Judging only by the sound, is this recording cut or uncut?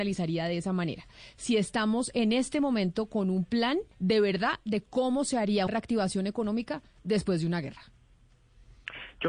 cut